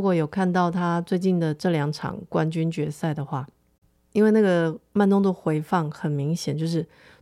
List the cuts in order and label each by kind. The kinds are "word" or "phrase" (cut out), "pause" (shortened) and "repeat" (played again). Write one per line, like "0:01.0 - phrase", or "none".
none

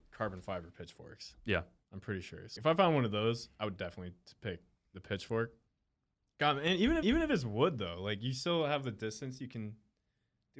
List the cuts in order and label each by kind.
0:02.6 - word
0:07.0 - repeat

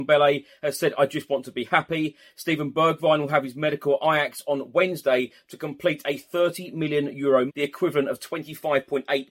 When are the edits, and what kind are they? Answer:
0:07.5 - word

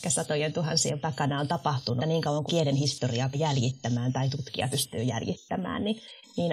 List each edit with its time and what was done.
0:01.0 - word
0:02.0 - word
0:02.5 - word
0:03.3 - word
0:04.7 - word

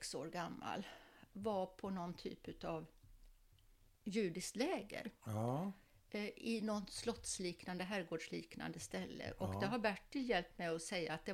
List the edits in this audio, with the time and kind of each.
none

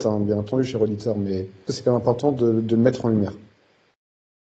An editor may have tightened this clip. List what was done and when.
0:01.7 - phrase

